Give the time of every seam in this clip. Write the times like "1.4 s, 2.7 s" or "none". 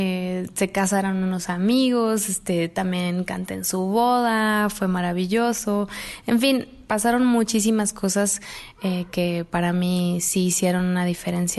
none

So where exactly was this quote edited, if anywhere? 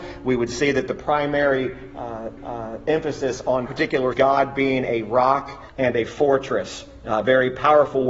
2.4 s, 3.7 s, 4.1 s, 5.7 s

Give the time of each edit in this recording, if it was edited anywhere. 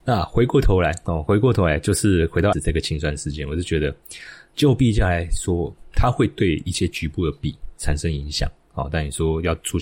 2.5 s, 5.9 s

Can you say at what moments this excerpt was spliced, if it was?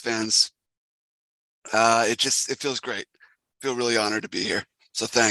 none

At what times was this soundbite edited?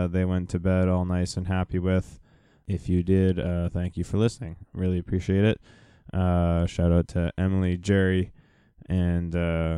none

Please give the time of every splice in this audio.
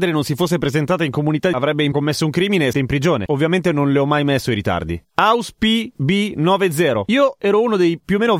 1.5 s, 1.9 s, 2.7 s, 5.1 s

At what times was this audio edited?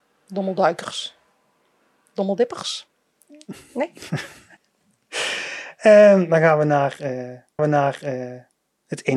4.6 s, 7.6 s

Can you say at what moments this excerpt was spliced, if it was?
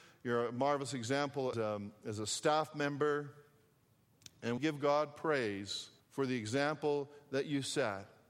1.5 s, 4.6 s, 6.0 s

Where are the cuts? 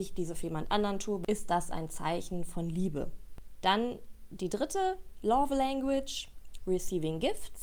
none

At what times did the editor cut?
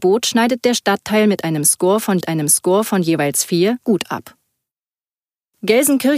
2.2 s

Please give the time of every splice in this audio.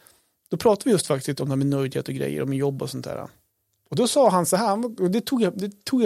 none

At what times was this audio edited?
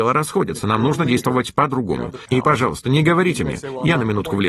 none

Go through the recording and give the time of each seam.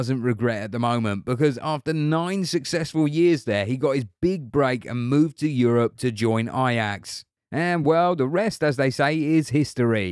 none

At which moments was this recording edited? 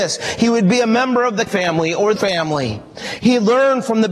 1.5 s, 2.2 s

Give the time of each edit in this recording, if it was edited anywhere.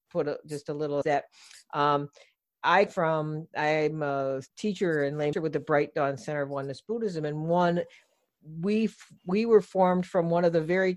1.0 s, 2.9 s, 4.5 s, 5.3 s

